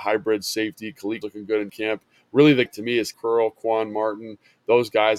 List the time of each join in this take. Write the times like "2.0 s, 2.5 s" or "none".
1.2 s, 1.7 s, 2.7 s, 3.1 s